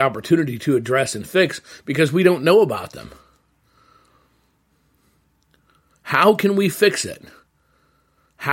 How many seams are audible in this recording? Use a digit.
0